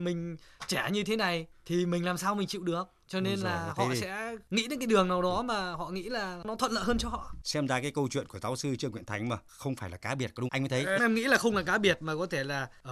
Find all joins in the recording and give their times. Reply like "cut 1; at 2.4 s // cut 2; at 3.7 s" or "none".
cut 1; at 10.5 s // cut 2; at 11.0 s